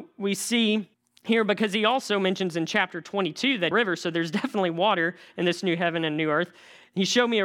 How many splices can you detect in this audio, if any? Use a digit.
2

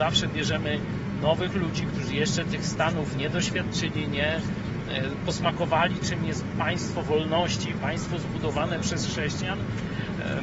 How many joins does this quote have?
0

